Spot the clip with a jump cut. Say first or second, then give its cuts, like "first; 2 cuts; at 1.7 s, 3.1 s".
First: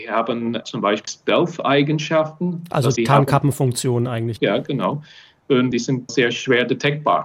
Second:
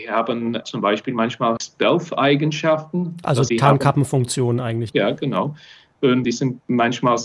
first; 2 cuts; at 1.1 s, 6.1 s